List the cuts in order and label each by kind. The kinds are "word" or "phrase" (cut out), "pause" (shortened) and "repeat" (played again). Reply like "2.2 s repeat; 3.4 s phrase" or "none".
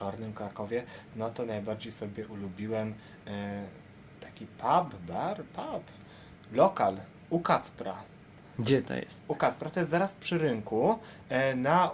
none